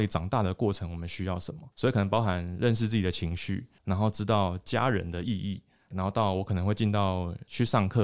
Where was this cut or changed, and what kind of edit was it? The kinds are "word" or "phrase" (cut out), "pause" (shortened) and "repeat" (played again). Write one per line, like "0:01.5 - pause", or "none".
0:01.7 - pause
0:03.8 - pause
0:05.9 - word